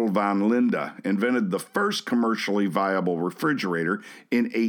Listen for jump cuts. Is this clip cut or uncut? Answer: uncut